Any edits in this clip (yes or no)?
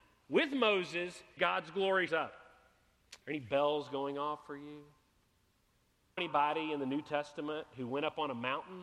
yes